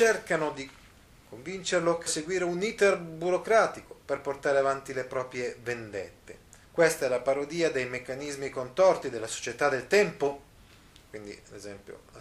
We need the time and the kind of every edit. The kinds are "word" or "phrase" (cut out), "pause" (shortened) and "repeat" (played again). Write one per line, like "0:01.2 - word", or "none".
0:02.1 - word
0:06.6 - pause